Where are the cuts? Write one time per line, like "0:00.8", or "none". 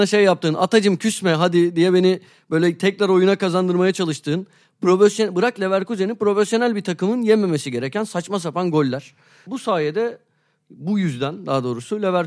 none